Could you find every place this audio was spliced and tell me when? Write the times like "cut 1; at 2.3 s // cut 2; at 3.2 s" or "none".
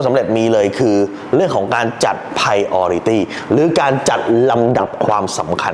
none